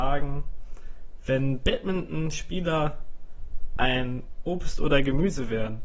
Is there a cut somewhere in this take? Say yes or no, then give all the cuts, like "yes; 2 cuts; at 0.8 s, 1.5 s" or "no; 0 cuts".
no; 0 cuts